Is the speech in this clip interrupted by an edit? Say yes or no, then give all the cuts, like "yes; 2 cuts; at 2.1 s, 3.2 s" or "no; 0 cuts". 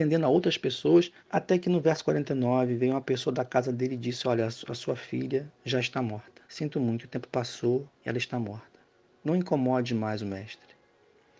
yes; 3 cuts; at 1.2 s, 6.4 s, 7.9 s